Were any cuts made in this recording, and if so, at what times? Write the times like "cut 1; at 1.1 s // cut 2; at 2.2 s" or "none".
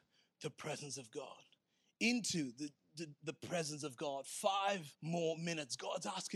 cut 1; at 4.9 s